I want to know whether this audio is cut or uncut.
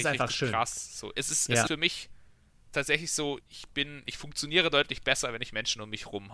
cut